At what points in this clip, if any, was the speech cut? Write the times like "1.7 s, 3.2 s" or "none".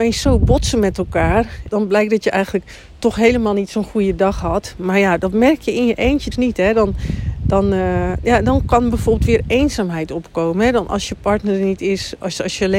1.7 s, 6.3 s